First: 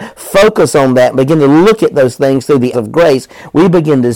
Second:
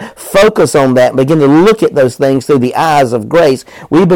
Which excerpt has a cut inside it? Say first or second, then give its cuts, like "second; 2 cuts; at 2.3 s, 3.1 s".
first; 1 cut; at 2.7 s